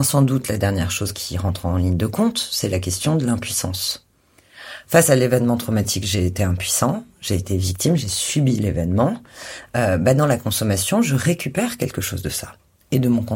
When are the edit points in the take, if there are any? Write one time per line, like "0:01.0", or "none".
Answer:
none